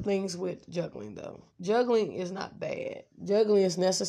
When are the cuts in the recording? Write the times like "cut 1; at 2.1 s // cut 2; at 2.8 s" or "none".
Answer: cut 1; at 1.5 s